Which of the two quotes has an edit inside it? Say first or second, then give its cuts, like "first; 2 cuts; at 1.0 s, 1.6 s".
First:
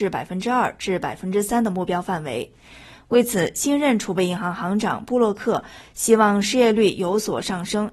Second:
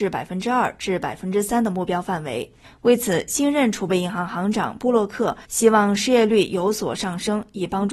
second; 2 cuts; at 2.6 s, 5.4 s